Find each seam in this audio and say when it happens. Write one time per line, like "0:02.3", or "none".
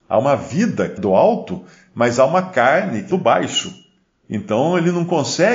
0:01.0
0:03.1